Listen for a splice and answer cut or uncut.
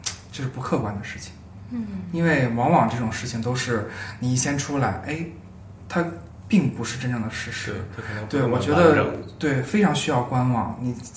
uncut